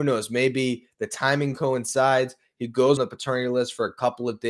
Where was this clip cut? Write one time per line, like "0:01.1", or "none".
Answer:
0:03.0